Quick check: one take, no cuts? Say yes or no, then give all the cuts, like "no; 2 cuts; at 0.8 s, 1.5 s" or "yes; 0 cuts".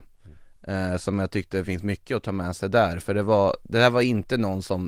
yes; 0 cuts